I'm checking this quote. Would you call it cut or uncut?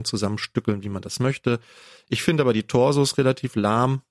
uncut